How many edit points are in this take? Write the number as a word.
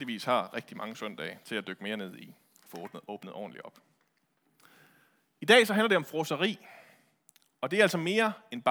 zero